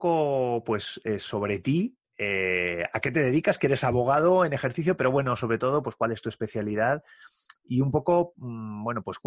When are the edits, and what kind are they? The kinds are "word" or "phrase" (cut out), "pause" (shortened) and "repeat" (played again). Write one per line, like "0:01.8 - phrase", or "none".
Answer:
none